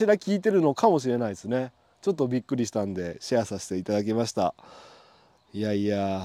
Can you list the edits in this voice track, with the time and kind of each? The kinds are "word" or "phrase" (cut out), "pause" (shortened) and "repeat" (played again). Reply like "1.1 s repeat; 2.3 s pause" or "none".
none